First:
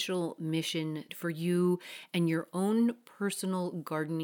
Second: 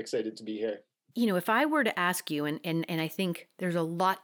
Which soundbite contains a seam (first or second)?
first